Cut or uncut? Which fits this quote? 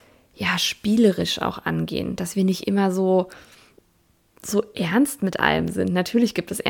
uncut